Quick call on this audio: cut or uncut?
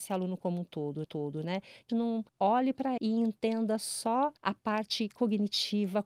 cut